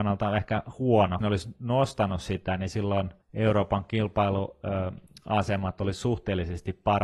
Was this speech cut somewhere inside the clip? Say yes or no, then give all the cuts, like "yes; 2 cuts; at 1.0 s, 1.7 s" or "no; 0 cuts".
yes; 2 cuts; at 1.2 s, 3.2 s